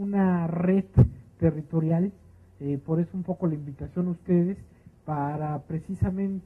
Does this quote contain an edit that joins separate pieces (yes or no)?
no